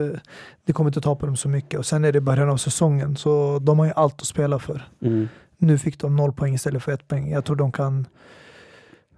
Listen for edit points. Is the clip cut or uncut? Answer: uncut